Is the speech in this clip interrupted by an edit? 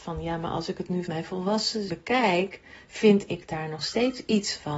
yes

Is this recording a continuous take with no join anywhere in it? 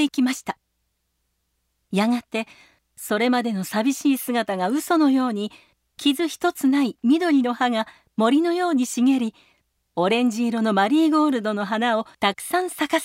no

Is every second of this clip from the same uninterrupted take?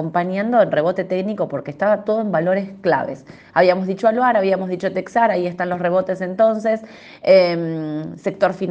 yes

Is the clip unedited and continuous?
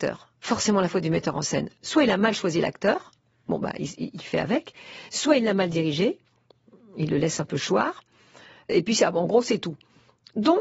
yes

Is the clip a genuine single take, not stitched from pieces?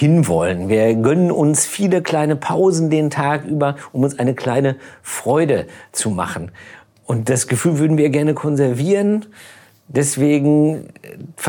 yes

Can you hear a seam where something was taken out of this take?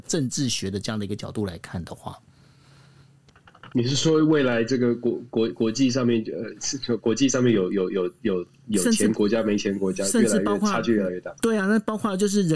yes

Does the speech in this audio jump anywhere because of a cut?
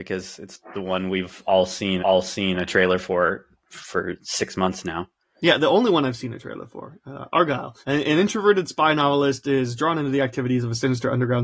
yes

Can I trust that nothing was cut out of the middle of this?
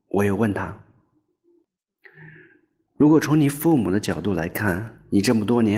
yes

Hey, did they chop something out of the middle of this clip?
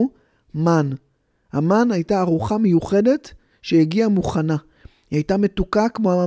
no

